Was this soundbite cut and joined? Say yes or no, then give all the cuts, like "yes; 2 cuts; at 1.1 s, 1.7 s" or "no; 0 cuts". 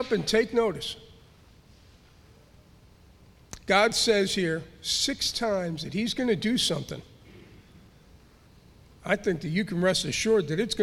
no; 0 cuts